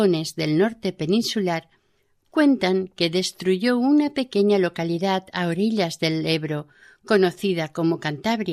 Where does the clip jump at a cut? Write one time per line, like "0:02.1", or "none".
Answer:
none